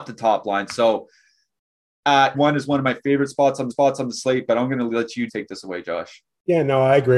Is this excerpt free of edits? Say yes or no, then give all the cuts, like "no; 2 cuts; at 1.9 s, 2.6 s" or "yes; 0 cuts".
no; 3 cuts; at 2.3 s, 3.7 s, 5.3 s